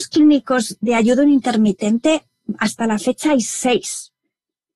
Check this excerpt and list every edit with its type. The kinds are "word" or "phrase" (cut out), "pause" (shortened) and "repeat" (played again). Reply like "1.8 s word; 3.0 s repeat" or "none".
none